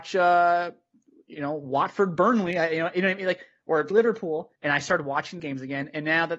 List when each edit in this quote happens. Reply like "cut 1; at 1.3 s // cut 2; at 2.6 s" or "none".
cut 1; at 3.9 s // cut 2; at 4.6 s // cut 3; at 5.4 s